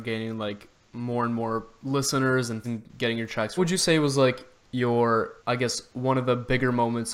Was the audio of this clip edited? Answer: yes; 3 cuts; at 2.6 s, 3.6 s, 5.4 s

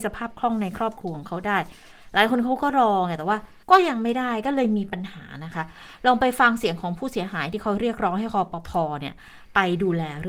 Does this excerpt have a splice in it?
yes; 1 cut; at 3.6 s

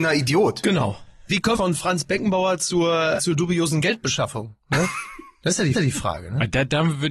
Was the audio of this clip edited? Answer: yes; 3 cuts; at 1.5 s, 3.2 s, 5.7 s

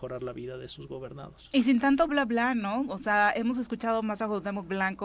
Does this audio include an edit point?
yes; 1 cut; at 2.1 s

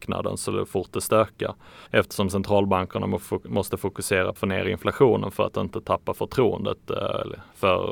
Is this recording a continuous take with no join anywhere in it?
no; 2 cuts; at 1.9 s, 4.4 s

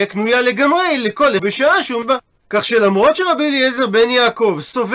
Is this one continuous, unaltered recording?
no; 2 cuts; at 1.4 s, 2.0 s

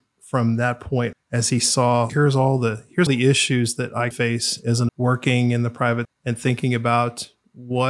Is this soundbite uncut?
no; 6 cuts; at 1.1 s, 2.1 s, 3.1 s, 4.1 s, 4.9 s, 6.0 s

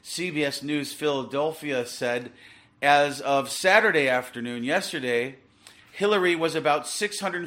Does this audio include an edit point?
no; 0 cuts

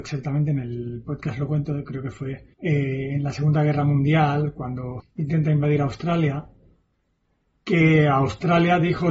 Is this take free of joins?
no; 2 cuts; at 2.5 s, 5.0 s

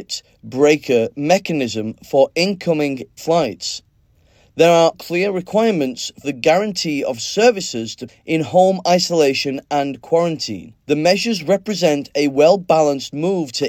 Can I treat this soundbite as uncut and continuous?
no; 5 cuts; at 3.2 s, 4.9 s, 6.2 s, 8.1 s, 10.8 s

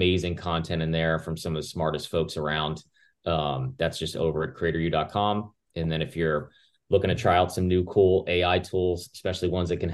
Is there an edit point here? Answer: no; 0 cuts

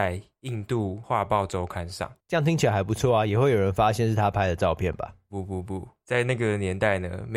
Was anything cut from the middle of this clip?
yes; 1 cut; at 2.2 s

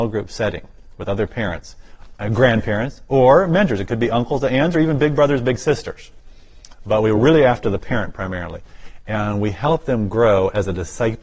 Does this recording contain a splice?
no; 0 cuts

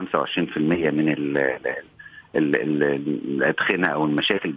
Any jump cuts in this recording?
no; 0 cuts

